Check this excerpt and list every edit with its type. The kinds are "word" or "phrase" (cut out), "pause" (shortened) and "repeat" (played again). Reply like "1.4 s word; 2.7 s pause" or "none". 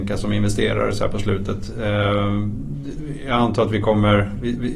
none